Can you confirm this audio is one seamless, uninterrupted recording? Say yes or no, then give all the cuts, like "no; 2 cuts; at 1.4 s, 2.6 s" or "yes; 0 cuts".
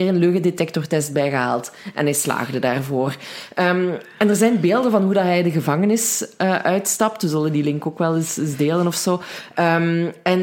yes; 0 cuts